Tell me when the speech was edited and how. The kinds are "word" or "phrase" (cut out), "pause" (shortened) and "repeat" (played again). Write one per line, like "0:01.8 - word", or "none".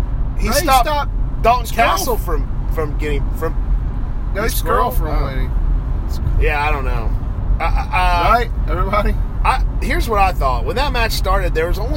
0:04.5 - word